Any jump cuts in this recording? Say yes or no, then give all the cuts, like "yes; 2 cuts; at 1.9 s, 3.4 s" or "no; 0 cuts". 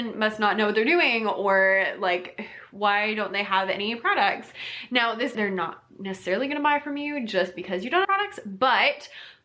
yes; 2 cuts; at 5.3 s, 8.0 s